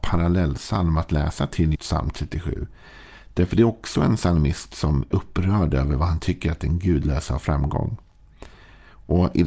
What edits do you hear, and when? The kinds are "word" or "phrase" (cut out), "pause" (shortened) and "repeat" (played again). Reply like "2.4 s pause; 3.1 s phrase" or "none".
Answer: 1.7 s word; 5.1 s word